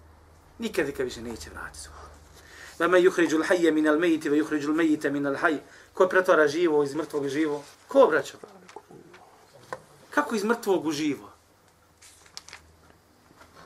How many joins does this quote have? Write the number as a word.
two